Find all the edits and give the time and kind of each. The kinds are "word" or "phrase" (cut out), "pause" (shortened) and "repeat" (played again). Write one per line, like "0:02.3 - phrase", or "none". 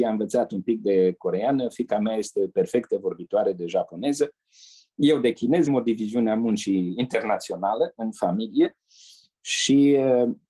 0:05.7 - word